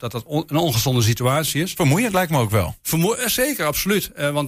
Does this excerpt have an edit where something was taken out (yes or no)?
no